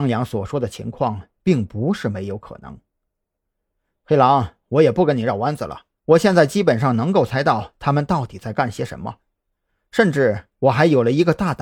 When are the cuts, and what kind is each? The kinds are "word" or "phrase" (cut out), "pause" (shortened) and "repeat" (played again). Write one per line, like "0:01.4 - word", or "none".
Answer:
0:05.9 - pause